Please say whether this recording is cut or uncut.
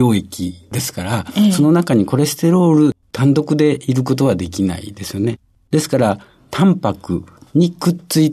uncut